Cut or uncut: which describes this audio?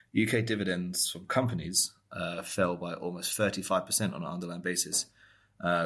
uncut